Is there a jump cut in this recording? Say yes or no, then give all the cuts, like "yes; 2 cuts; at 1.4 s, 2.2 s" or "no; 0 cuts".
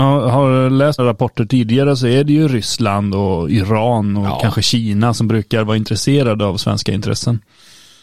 yes; 1 cut; at 1.0 s